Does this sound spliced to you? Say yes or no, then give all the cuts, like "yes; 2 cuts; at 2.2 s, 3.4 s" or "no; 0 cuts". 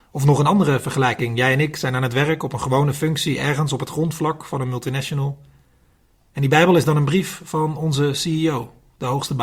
no; 0 cuts